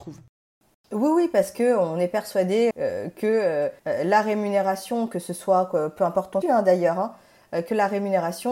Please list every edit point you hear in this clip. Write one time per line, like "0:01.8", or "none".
0:02.7
0:03.8
0:06.4